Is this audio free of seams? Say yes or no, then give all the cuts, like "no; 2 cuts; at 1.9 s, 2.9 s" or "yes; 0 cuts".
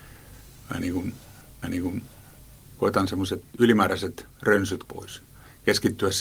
no; 3 cuts; at 1.6 s, 3.5 s, 4.8 s